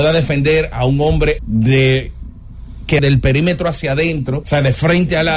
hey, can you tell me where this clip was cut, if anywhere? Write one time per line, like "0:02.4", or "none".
0:01.4
0:03.0
0:04.4